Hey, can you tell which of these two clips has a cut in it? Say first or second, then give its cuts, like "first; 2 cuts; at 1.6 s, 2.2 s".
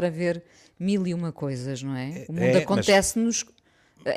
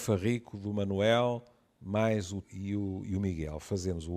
second; 1 cut; at 2.4 s